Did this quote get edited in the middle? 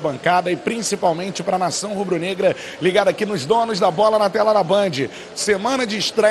no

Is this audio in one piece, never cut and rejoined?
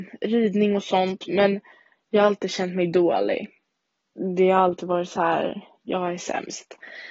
yes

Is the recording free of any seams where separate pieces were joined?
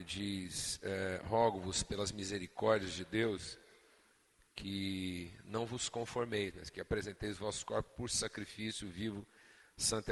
yes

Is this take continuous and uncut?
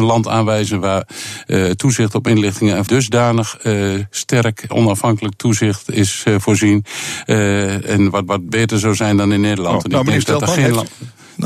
no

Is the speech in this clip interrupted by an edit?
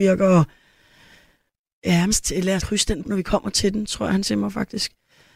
yes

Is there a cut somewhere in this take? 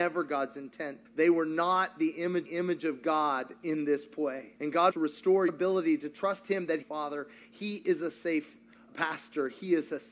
yes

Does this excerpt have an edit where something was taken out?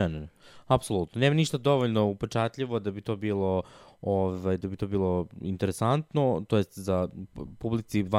no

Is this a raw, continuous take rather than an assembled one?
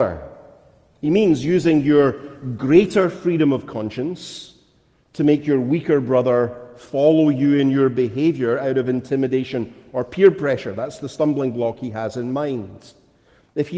yes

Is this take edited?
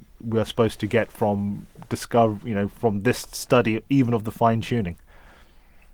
no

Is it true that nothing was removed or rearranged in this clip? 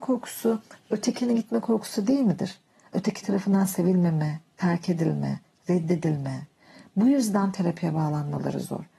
yes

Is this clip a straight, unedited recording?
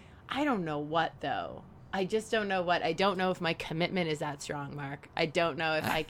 yes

